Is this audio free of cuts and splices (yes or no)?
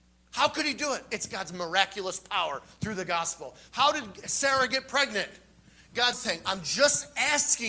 no